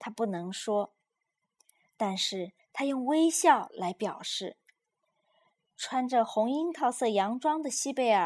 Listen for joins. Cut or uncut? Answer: uncut